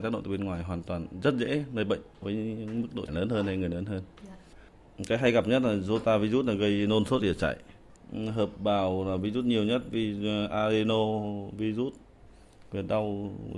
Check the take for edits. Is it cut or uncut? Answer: cut